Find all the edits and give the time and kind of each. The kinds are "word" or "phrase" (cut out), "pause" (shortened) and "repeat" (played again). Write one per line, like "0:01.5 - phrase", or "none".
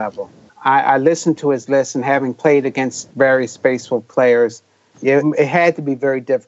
0:03.1 - word
0:05.2 - word